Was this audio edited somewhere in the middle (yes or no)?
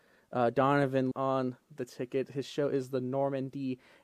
yes